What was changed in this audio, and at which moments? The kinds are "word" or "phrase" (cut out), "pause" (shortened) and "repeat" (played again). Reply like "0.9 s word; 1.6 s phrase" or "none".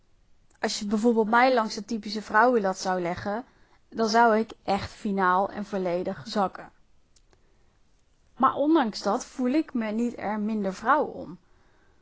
none